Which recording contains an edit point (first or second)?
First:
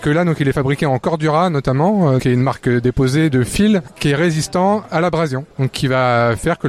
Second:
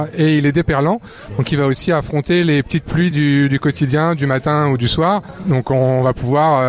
first